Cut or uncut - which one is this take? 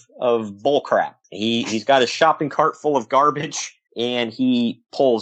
cut